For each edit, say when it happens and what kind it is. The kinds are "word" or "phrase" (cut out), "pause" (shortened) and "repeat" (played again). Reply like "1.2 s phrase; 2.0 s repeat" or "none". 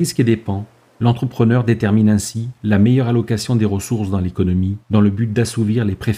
4.8 s pause

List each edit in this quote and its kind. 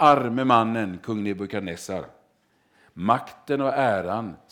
none

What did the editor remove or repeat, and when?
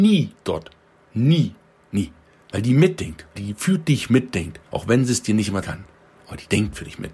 3.4 s word; 4.7 s pause; 5.6 s word

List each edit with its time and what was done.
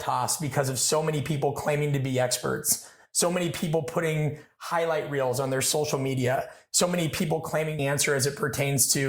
7.8 s phrase

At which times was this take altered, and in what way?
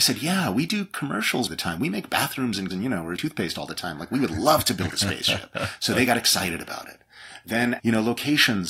1.5 s word; 2.7 s word; 3.2 s word; 7.8 s word

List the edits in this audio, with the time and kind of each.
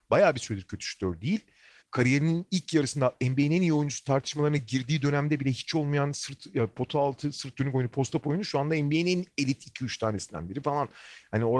none

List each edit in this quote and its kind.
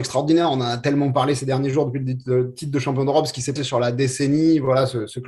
3.6 s word

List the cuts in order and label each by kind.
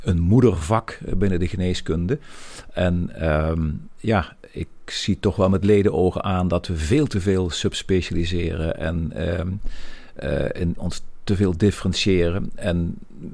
10.8 s word

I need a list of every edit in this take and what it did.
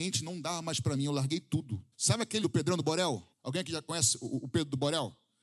1.9 s pause; 2.4 s word; 3.3 s pause

